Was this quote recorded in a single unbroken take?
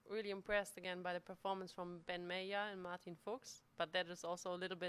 yes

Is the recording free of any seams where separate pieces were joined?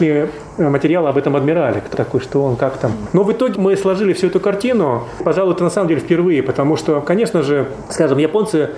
no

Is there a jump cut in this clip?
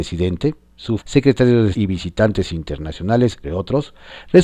yes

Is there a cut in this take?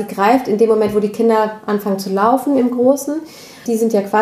no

